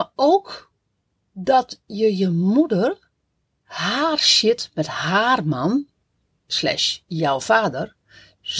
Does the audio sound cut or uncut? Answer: uncut